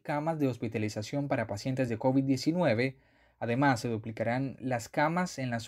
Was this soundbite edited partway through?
no; 0 cuts

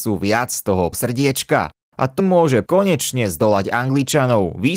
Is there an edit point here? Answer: yes; 3 cuts; at 0.9 s, 2.2 s, 2.7 s

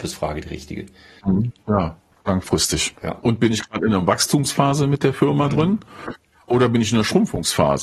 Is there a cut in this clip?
no; 0 cuts

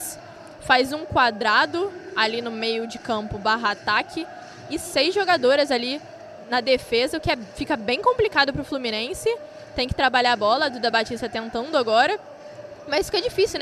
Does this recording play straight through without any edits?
yes; 0 cuts

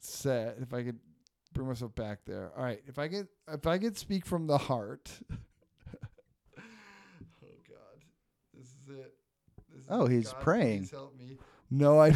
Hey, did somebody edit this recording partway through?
no; 0 cuts

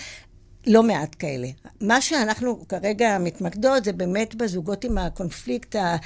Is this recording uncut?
yes; 0 cuts

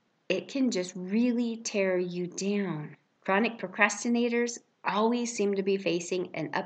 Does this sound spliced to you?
no; 0 cuts

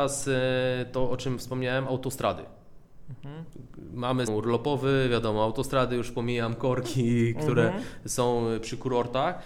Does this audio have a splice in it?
yes; 1 cut; at 4.3 s

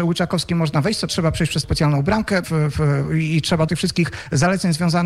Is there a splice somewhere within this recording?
yes; 4 cuts; at 1.1 s, 1.6 s, 2.4 s, 3.7 s

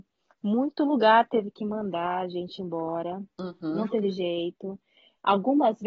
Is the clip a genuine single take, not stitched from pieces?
yes; 0 cuts

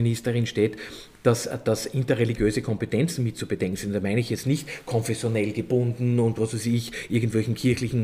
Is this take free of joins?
yes; 0 cuts

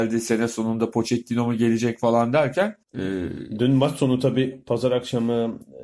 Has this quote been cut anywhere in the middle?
yes; 1 cut; at 2.8 s

